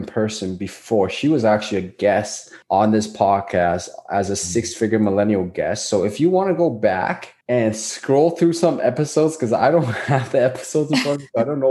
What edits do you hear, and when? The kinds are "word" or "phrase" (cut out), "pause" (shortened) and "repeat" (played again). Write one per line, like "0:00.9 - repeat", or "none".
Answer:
0:02.6 - pause
0:07.4 - pause